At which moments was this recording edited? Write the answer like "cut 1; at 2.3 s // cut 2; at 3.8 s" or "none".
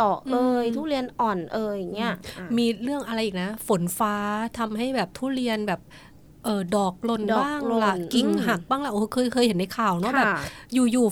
none